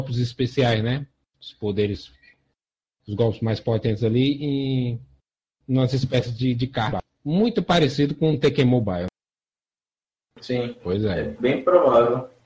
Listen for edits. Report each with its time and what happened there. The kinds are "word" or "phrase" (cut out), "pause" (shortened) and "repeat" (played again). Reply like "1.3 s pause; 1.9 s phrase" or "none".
none